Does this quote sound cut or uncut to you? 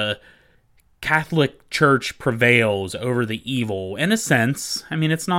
uncut